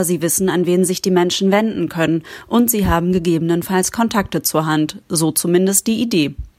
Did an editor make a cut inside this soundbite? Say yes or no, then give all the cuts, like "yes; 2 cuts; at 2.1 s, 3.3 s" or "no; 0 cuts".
no; 0 cuts